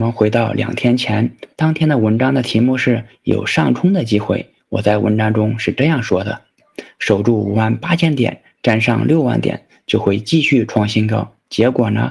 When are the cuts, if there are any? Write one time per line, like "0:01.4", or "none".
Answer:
0:01.5